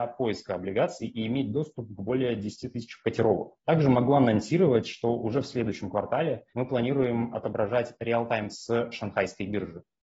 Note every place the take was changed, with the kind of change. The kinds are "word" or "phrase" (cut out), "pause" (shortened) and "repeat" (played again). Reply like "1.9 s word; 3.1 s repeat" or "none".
3.6 s pause; 6.5 s pause; 8.5 s word